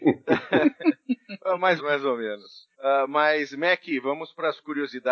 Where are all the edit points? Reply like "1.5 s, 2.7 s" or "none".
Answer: 1.8 s, 2.7 s